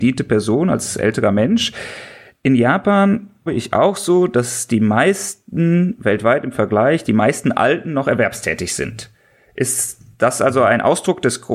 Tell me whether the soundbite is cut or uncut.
cut